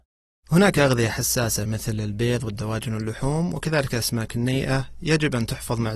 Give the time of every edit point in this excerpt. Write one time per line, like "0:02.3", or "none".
none